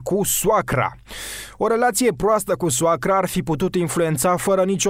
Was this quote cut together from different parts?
no; 0 cuts

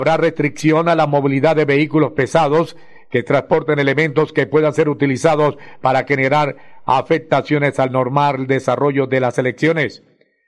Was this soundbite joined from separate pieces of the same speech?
no; 0 cuts

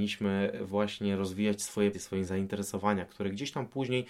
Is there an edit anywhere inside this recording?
yes; 1 cut; at 1.9 s

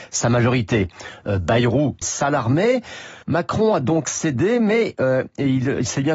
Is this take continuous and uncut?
no; 2 cuts; at 2.0 s, 3.2 s

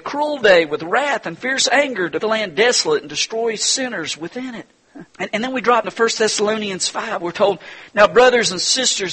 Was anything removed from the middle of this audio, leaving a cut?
yes; 3 cuts; at 2.2 s, 5.1 s, 5.8 s

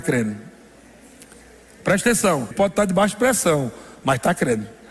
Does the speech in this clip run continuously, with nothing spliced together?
no; 1 cut; at 2.5 s

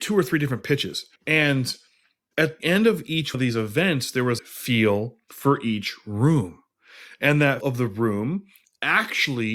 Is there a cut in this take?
yes; 5 cuts; at 1.2 s, 2.6 s, 3.3 s, 4.4 s, 7.6 s

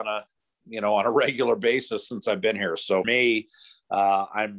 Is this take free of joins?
no; 1 cut; at 3.0 s

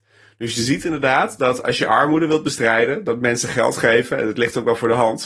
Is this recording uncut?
yes; 0 cuts

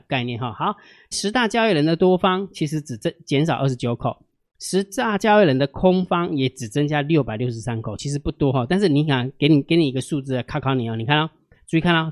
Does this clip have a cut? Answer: yes; 1 cut; at 1.1 s

